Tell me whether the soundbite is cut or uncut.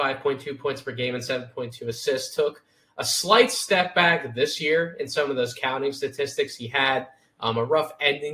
uncut